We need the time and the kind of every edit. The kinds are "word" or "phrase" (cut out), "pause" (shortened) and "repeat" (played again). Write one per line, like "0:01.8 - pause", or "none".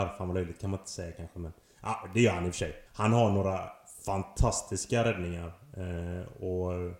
0:02.9 - pause